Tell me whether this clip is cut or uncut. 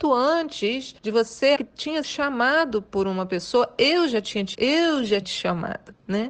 cut